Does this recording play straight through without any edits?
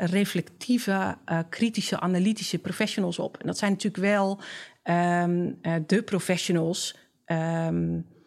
yes; 0 cuts

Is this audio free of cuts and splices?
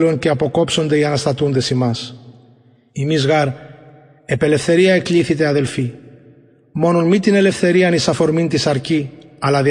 yes; 0 cuts

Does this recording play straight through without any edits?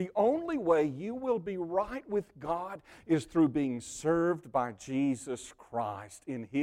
yes; 0 cuts

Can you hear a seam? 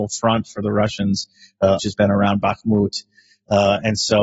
yes; 1 cut; at 1.8 s

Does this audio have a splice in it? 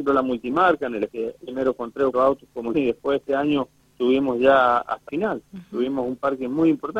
yes; 7 cuts; at 1.1 s, 1.4 s, 2.1 s, 2.7 s, 3.8 s, 5.1 s, 5.5 s

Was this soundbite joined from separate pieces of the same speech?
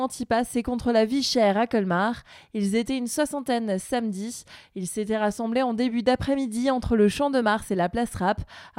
no; 0 cuts

